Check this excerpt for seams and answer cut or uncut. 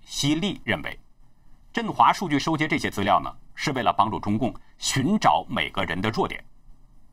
cut